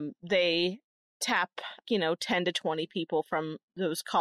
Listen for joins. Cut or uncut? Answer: cut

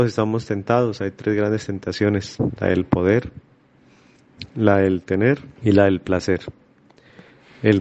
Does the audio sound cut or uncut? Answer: cut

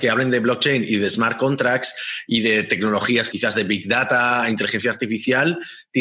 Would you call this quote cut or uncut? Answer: cut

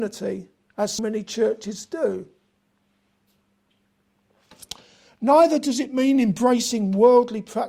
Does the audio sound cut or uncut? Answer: cut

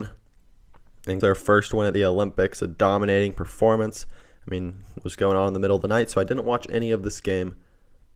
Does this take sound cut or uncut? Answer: cut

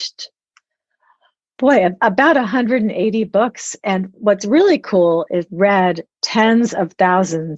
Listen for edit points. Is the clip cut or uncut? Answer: cut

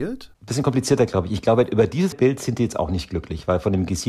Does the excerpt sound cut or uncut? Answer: cut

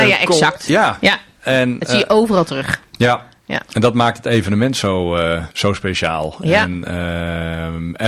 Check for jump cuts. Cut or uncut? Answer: cut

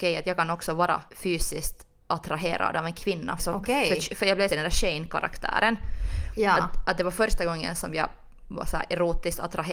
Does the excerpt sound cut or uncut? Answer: cut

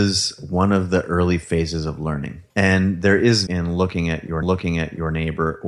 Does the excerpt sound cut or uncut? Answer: cut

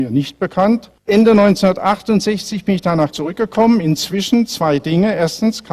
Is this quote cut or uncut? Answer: cut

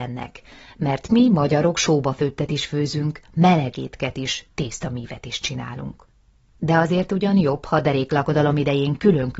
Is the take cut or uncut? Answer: uncut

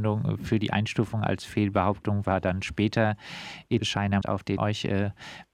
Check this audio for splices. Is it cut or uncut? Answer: cut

